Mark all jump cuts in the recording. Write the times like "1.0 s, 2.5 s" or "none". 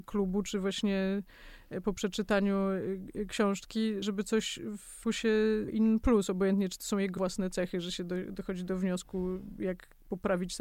4.0 s, 5.0 s, 5.7 s, 7.2 s

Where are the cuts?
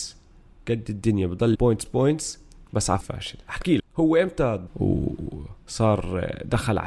1.5 s, 1.9 s, 3.0 s, 3.8 s, 4.7 s

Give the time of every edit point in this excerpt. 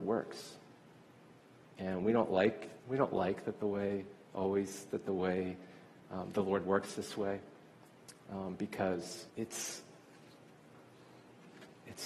2.8 s, 9.3 s

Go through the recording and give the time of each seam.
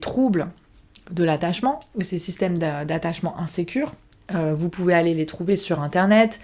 none

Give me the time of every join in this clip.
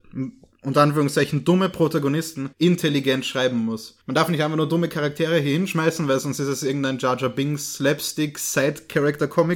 2.5 s, 4.0 s

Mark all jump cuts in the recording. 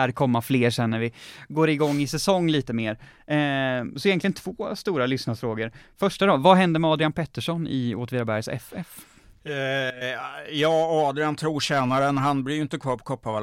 none

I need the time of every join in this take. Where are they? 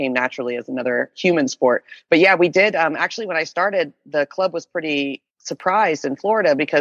5.3 s

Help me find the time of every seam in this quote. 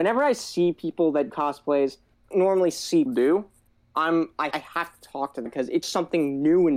1.3 s, 2.3 s, 3.1 s, 4.5 s, 5.5 s, 5.8 s

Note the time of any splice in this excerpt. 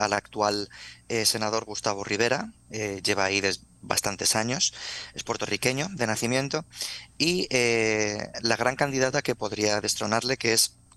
none

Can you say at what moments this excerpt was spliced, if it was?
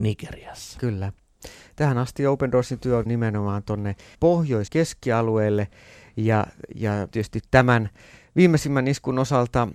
3.1 s, 4.1 s, 4.7 s, 7.1 s

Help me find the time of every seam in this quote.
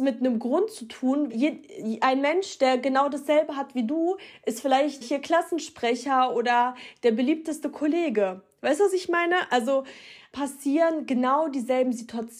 1.3 s, 5.0 s, 10.3 s

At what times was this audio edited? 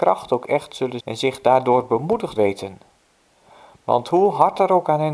1.0 s, 2.4 s

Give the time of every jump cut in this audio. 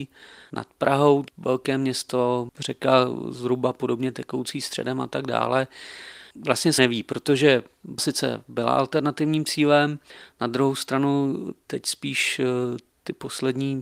1.3 s, 6.8 s, 8.0 s

